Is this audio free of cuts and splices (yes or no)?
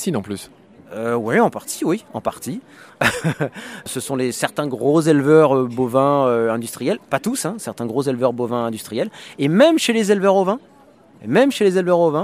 yes